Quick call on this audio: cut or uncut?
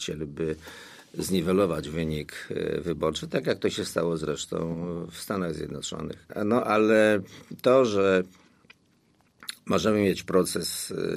uncut